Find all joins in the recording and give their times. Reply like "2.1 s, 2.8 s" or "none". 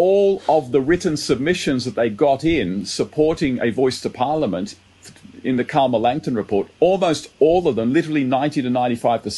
6.7 s